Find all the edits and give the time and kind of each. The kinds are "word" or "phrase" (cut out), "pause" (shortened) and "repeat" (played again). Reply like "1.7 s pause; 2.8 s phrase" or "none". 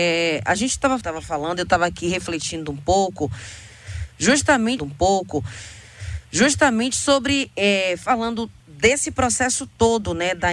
1.0 s phrase; 4.8 s repeat; 8.6 s pause

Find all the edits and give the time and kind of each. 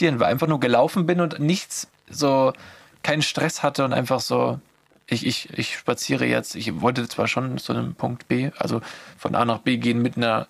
none

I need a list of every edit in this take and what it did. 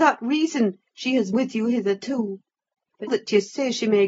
1.3 s word; 3.1 s word

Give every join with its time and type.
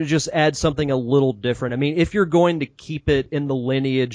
none

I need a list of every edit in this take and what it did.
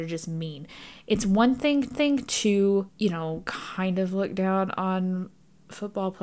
1.9 s repeat

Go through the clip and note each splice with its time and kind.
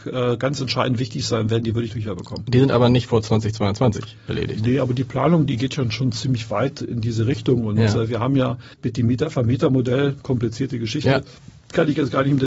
1.9 s phrase; 8.7 s pause

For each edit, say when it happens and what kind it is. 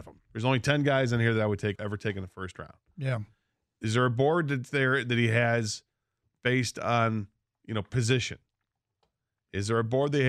1.8 s word

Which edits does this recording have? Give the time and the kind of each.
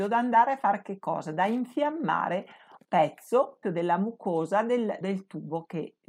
2.8 s word; 3.6 s word; 5.0 s word

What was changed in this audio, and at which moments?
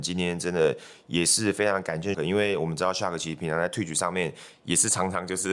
2.1 s word

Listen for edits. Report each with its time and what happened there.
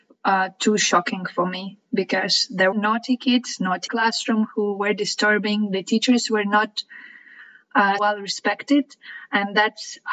2.7 s phrase; 3.9 s phrase; 8.0 s word

